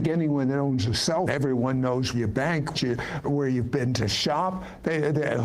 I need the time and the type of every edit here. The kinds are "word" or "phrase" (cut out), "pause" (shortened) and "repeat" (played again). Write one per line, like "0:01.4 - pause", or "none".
0:01.3 - word
0:02.1 - word
0:02.7 - word
0:03.2 - word